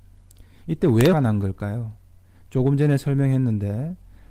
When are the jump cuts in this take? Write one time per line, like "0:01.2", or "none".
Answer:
0:01.1